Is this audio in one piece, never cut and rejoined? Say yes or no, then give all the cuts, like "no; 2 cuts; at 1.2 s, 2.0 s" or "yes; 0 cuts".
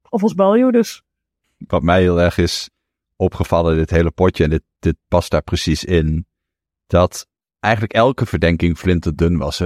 yes; 0 cuts